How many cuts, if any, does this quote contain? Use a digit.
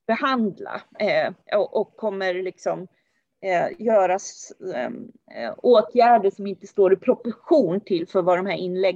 0